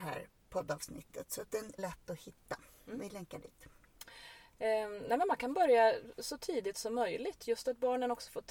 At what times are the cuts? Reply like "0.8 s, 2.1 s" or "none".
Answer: 1.8 s